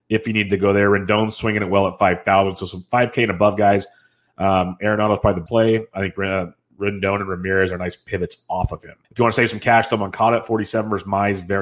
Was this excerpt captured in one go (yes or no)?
no